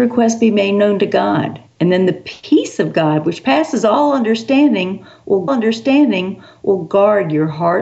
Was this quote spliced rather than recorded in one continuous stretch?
yes; 2 cuts; at 1.7 s, 5.5 s

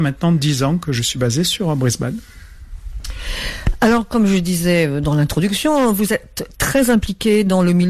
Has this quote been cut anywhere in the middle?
no; 0 cuts

